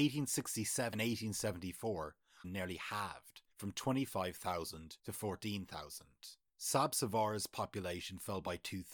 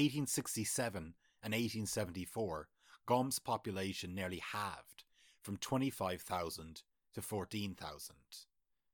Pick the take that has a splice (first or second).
first